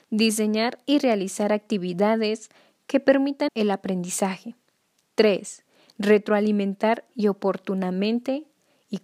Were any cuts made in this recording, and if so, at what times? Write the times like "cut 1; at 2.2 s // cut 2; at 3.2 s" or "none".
cut 1; at 3.5 s // cut 2; at 7.1 s